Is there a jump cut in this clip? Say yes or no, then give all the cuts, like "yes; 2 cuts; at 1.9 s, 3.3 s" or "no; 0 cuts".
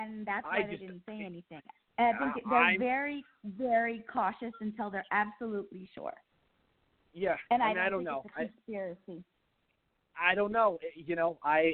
no; 0 cuts